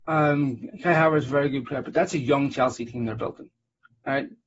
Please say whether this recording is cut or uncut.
uncut